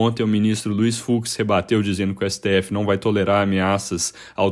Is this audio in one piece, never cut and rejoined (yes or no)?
yes